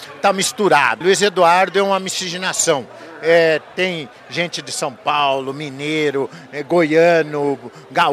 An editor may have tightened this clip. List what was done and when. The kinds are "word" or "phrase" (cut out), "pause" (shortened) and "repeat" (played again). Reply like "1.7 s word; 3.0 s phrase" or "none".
1.0 s phrase